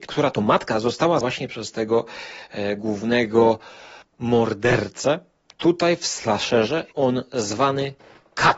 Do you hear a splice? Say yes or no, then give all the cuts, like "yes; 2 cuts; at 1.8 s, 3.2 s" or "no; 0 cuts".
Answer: yes; 3 cuts; at 1.2 s, 4.0 s, 6.9 s